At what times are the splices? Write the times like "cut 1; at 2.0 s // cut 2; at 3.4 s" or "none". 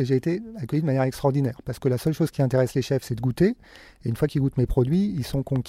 none